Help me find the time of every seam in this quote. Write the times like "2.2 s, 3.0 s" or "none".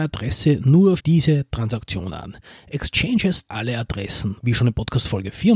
1.0 s, 3.5 s, 4.4 s